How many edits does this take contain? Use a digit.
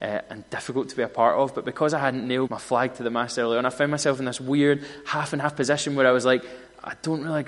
1